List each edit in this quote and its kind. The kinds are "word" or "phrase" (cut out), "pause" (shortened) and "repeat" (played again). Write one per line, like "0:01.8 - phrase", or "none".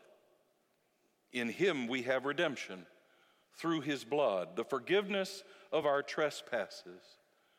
none